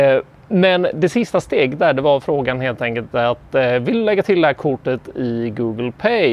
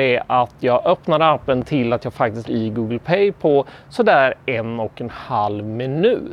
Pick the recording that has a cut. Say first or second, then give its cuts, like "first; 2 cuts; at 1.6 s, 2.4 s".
second; 1 cut; at 2.4 s